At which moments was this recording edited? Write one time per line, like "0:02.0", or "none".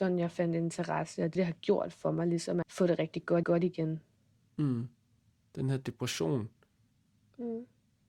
0:01.4
0:02.6
0:03.4
0:05.2